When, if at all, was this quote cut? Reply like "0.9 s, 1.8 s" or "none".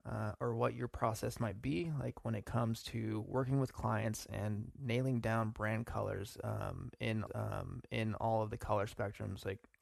7.3 s